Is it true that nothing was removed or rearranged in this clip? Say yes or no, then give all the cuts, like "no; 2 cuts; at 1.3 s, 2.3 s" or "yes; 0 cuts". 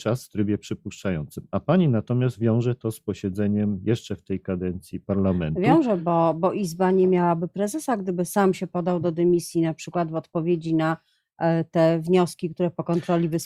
yes; 0 cuts